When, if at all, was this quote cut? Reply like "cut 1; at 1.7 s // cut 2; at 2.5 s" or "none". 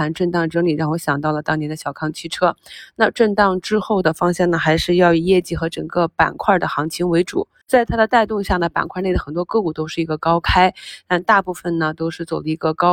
none